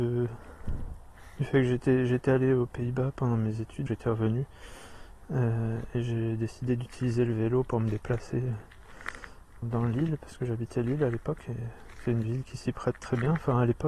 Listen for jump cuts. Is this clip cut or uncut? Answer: cut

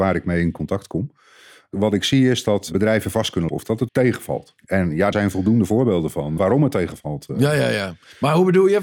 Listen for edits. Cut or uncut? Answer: cut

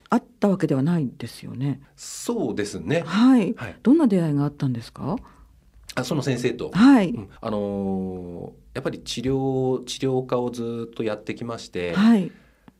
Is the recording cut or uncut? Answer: cut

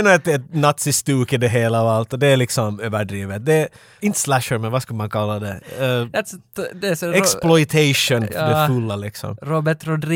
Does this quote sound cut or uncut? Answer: cut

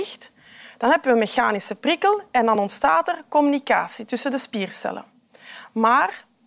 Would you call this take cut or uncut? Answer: uncut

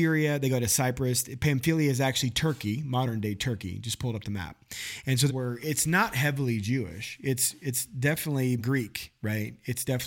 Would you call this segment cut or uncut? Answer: cut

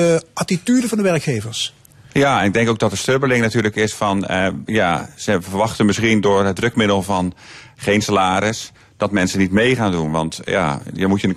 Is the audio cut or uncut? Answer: uncut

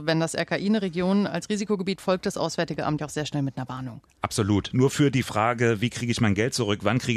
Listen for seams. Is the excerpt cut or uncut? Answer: cut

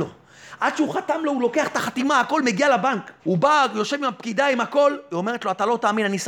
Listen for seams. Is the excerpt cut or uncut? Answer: cut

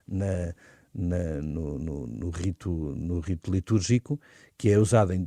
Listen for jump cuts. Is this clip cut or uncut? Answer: uncut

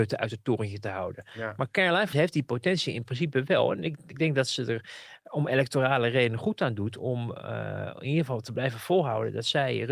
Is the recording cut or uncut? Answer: cut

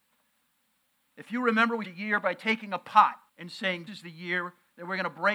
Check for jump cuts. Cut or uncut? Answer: cut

